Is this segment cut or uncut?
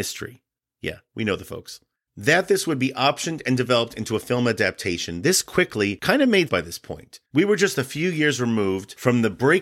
cut